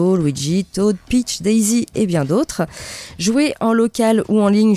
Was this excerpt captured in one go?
yes; 0 cuts

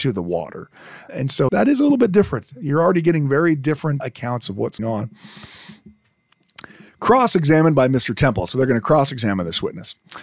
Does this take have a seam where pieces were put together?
yes; 4 cuts; at 1.1 s, 1.5 s, 4.0 s, 4.8 s

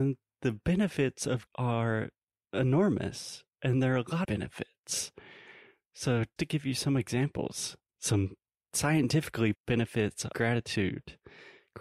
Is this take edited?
yes; 7 cuts; at 1.5 s, 3.5 s, 4.2 s, 6.4 s, 7.9 s, 9.5 s, 10.3 s

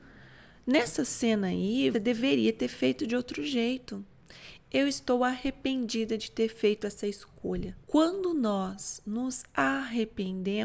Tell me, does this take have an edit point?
yes; 2 cuts; at 1.9 s, 7.8 s

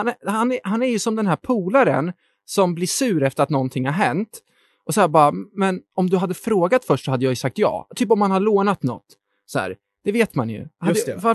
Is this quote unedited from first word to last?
yes; 0 cuts

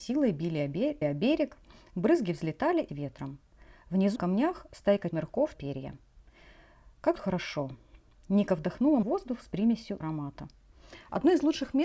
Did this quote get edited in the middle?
yes; 8 cuts; at 1.0 s, 2.9 s, 4.2 s, 5.1 s, 5.5 s, 7.2 s, 9.0 s, 10.0 s

